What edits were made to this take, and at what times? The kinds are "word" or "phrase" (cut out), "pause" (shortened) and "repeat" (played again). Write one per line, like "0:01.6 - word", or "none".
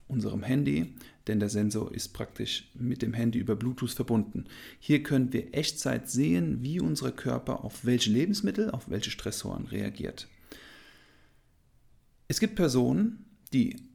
none